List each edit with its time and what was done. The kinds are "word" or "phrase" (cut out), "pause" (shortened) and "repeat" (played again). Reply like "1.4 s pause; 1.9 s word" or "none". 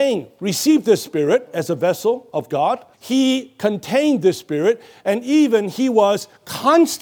2.9 s pause